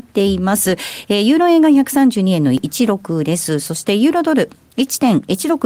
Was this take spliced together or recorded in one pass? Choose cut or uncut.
uncut